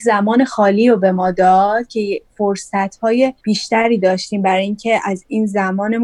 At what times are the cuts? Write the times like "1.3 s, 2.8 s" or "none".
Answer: 3.4 s

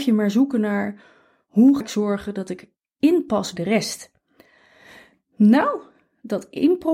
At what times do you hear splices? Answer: 1.8 s, 3.6 s

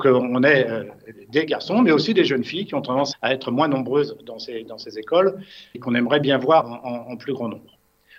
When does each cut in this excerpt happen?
3.1 s, 5.7 s, 6.6 s

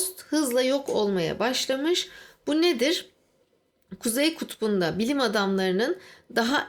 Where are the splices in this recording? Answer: none

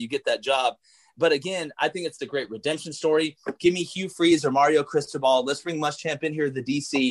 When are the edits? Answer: none

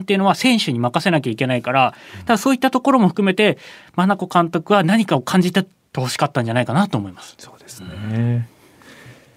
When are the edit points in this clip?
none

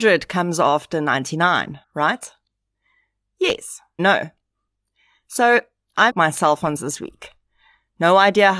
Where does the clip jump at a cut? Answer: 1.8 s, 4.0 s, 6.1 s, 6.8 s

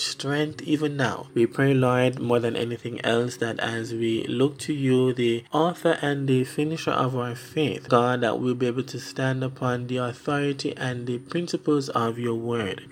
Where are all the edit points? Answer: 7.9 s

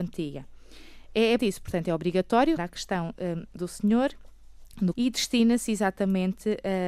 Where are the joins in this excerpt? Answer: 1.4 s, 2.6 s, 3.6 s, 4.9 s

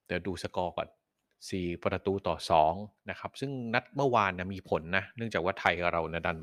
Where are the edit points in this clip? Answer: none

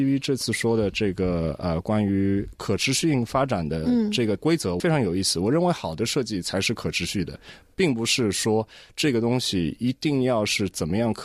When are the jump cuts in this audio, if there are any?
none

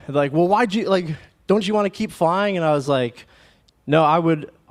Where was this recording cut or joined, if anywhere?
none

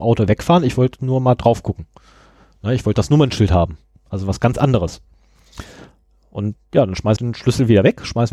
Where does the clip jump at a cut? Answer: 7.2 s

